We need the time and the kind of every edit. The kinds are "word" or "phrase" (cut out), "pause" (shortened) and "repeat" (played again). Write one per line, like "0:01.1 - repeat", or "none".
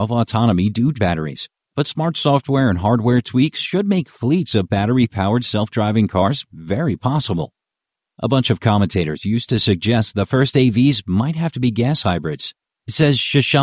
0:00.9 - phrase